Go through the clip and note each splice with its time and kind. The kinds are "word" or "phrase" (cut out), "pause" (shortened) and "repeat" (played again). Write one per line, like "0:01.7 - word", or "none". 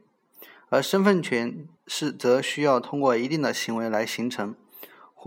0:01.8 - pause